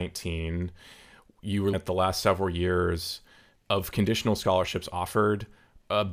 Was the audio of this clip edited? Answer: yes; 1 cut; at 1.7 s

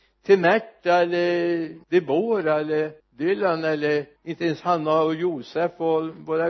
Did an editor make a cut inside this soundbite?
yes; 3 cuts; at 1.8 s, 3.0 s, 4.2 s

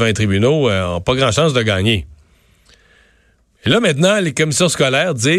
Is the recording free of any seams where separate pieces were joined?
yes; 0 cuts

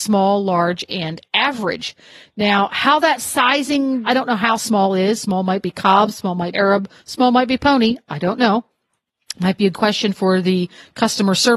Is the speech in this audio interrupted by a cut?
yes; 4 cuts; at 4.0 s, 4.6 s, 6.5 s, 9.7 s

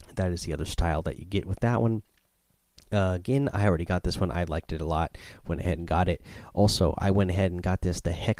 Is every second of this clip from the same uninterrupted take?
yes; 0 cuts

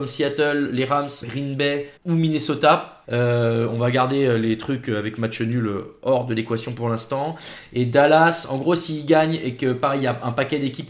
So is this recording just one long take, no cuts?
no; 3 cuts; at 1.2 s, 2.0 s, 3.0 s

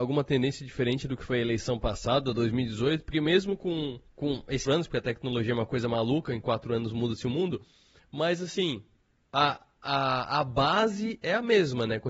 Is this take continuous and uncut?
no; 2 cuts; at 4.1 s, 4.7 s

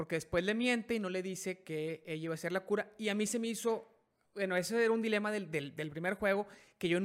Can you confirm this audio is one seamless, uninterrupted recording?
yes; 0 cuts

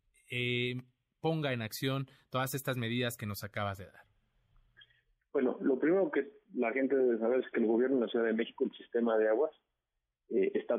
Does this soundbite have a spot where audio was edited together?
no; 0 cuts

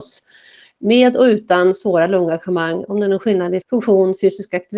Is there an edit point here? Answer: yes; 1 cut; at 3.6 s

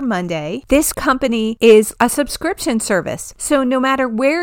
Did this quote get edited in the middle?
yes; 2 cuts; at 0.9 s, 2.0 s

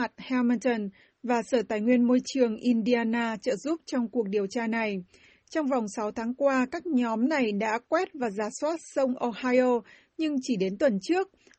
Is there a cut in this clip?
no; 0 cuts

